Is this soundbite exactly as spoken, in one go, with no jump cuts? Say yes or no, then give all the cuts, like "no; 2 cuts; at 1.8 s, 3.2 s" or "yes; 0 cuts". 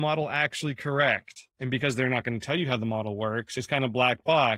no; 1 cut; at 1.5 s